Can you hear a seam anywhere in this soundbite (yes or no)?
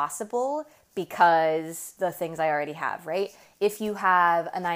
yes